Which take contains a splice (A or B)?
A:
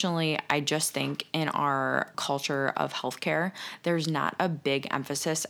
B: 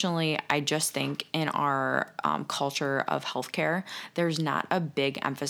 A